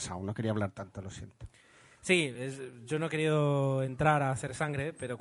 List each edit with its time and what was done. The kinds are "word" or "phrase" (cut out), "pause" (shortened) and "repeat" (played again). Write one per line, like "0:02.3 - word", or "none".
none